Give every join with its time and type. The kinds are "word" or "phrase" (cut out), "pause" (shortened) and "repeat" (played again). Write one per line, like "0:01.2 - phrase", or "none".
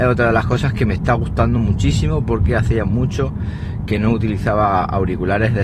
none